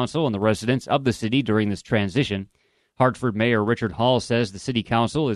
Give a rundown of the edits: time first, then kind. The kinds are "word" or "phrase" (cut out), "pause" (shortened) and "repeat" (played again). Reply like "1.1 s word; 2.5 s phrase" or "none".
none